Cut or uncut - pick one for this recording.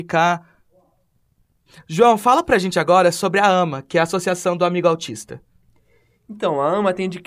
uncut